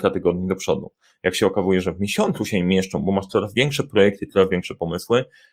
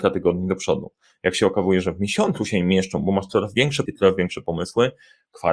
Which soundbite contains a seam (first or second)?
second